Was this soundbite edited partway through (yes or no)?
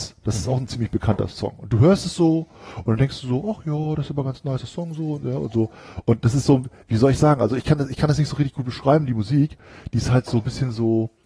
no